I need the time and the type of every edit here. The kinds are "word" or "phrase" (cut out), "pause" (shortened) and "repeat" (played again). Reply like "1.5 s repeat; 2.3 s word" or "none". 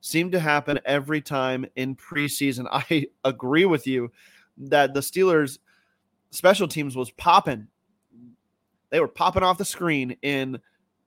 none